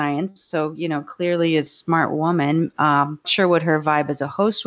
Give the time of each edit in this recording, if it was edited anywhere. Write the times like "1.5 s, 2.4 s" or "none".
1.7 s, 3.2 s